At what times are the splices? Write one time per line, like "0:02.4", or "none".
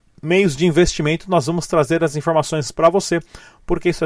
none